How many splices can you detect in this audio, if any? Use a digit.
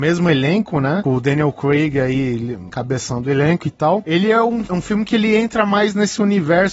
0